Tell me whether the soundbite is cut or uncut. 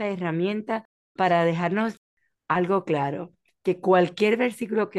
uncut